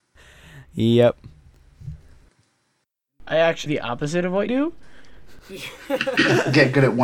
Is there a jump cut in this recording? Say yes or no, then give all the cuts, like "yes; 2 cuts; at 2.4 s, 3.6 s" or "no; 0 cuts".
yes; 2 cuts; at 3.7 s, 4.5 s